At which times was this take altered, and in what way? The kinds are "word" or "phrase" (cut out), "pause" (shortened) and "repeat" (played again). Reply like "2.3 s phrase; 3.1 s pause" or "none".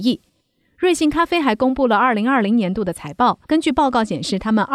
3.4 s pause